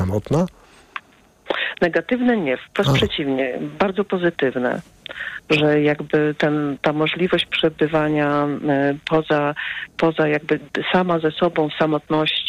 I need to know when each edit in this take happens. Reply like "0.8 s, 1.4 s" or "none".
none